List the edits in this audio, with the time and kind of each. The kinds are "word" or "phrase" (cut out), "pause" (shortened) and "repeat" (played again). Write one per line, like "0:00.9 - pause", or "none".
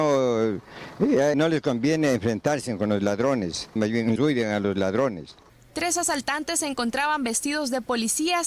0:01.3 - word
0:03.8 - word
0:04.2 - phrase